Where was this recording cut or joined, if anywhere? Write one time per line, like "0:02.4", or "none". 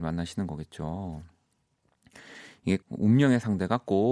0:02.8